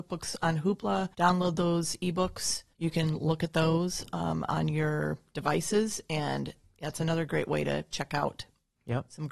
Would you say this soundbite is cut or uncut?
cut